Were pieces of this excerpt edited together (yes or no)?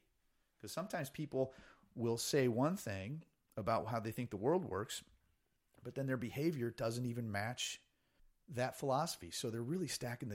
no